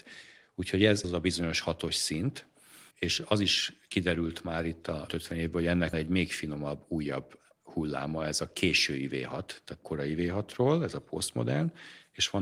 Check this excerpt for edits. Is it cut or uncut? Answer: cut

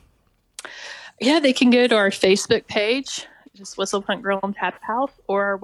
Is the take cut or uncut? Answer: uncut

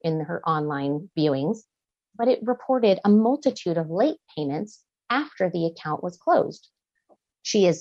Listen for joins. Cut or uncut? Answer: uncut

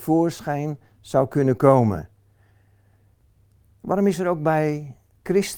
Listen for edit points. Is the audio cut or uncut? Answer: uncut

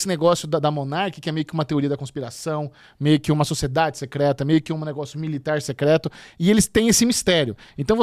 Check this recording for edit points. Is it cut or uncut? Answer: uncut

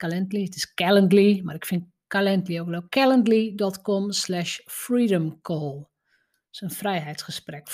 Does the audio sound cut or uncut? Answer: uncut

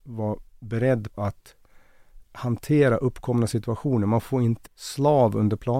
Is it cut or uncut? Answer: cut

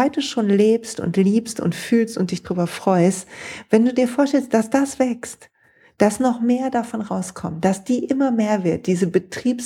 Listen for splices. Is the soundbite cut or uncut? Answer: uncut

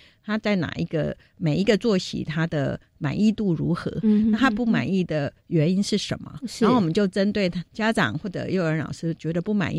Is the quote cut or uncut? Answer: cut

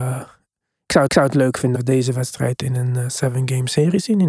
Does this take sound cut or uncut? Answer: cut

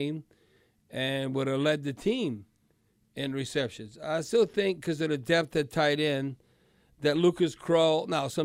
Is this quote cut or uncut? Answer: uncut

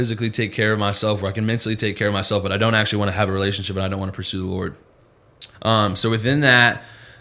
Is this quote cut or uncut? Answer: cut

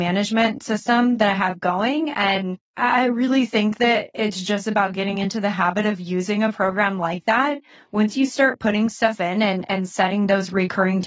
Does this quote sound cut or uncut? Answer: uncut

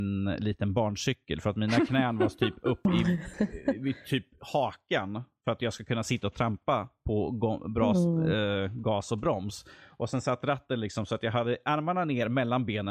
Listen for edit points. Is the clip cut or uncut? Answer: uncut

